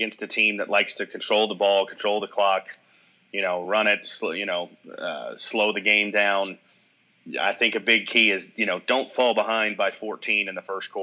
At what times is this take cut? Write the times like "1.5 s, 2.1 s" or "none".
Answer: none